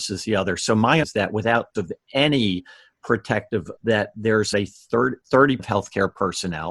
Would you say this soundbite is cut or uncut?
cut